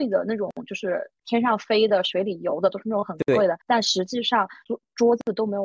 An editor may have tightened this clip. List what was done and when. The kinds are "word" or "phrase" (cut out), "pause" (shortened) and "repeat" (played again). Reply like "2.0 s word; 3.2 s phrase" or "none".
3.6 s pause